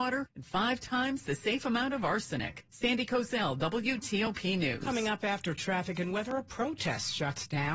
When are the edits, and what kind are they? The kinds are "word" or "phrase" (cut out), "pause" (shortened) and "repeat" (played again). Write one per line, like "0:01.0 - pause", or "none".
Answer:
none